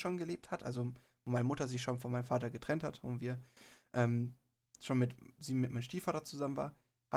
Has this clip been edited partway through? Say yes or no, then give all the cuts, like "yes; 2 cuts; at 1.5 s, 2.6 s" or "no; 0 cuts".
no; 0 cuts